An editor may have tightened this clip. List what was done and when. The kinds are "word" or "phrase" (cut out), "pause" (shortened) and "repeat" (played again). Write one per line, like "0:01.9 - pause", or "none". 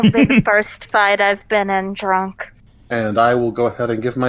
none